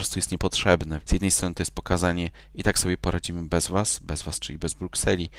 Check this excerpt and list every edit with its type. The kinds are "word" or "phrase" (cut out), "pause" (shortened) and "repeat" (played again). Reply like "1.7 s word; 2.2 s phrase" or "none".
1.0 s word